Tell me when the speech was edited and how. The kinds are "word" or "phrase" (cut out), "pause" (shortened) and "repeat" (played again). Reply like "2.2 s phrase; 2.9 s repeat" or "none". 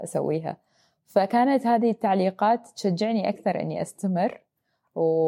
none

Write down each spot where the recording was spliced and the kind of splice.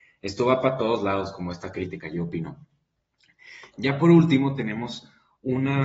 none

